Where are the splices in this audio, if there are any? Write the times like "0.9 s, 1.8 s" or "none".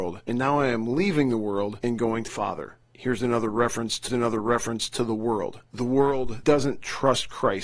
2.3 s, 4.1 s, 6.4 s

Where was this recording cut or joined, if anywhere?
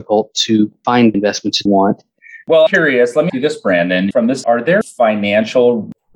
1.1 s, 1.7 s, 2.7 s, 3.3 s, 4.1 s, 4.4 s, 4.8 s

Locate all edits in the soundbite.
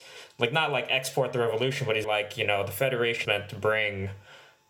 2.0 s, 3.2 s

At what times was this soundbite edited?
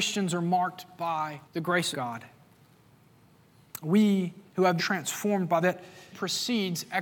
1.4 s, 1.9 s, 4.5 s, 4.8 s, 5.6 s, 6.1 s

